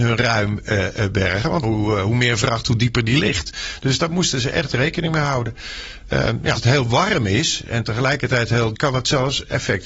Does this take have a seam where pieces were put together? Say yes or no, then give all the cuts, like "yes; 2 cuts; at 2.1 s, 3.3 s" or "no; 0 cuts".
yes; 3 cuts; at 1.6 s, 6.6 s, 8.7 s